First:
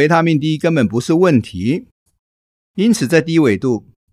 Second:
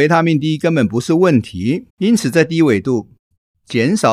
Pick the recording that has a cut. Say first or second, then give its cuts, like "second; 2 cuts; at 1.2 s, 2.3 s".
second; 1 cut; at 1.9 s